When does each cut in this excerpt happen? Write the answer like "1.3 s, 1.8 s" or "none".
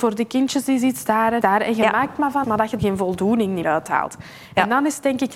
1.4 s, 2.4 s, 2.8 s, 3.6 s